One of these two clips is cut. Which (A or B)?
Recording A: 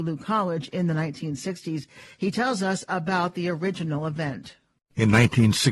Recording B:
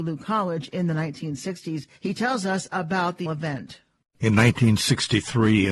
B